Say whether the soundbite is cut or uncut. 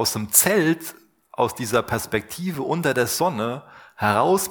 uncut